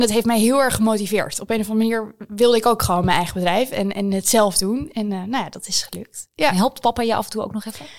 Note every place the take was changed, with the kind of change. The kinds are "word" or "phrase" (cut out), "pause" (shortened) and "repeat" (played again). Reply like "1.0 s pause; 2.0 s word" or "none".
none